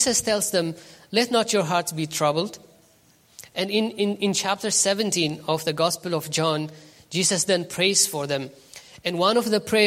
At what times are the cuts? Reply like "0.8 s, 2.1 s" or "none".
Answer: none